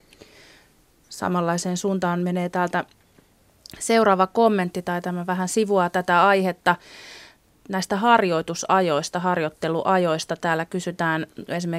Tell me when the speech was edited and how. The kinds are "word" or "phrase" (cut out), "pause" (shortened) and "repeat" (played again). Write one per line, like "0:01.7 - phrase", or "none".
none